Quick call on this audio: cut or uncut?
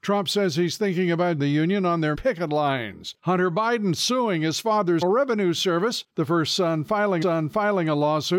cut